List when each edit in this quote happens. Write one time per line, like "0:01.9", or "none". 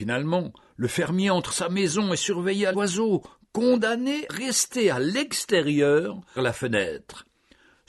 0:01.5
0:02.7
0:04.3
0:06.4